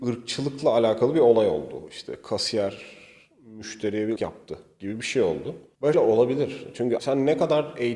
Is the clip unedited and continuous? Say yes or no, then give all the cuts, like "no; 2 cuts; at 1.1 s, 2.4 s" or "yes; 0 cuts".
no; 3 cuts; at 4.2 s, 5.9 s, 7.0 s